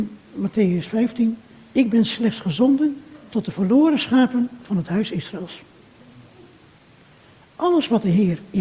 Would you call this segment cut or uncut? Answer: uncut